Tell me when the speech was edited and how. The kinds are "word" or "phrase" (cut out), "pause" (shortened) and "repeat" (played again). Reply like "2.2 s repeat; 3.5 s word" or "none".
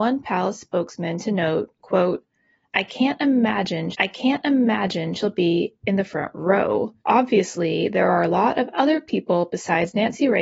3.9 s repeat; 7.0 s pause